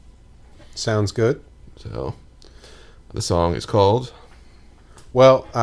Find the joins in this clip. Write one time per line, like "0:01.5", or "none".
0:03.1